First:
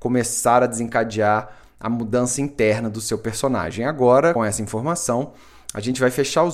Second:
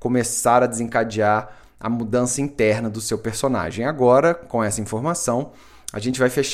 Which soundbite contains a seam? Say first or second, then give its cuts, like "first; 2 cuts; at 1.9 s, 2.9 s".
first; 1 cut; at 4.4 s